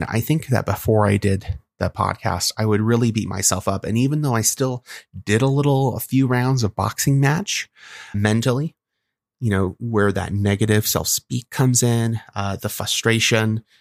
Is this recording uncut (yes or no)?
no